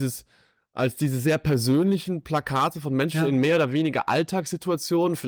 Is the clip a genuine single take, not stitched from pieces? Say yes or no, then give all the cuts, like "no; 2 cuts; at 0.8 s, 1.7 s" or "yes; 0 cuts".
yes; 0 cuts